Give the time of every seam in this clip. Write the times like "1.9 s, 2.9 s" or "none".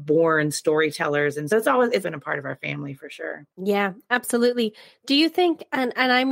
1.5 s, 2.0 s